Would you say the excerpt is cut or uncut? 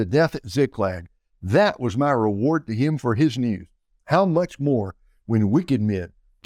uncut